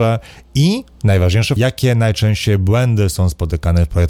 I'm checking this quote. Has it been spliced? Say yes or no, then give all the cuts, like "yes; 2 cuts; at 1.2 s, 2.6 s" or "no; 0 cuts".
yes; 1 cut; at 1.6 s